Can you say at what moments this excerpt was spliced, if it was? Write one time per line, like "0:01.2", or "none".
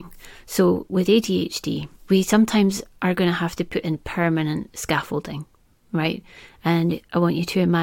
none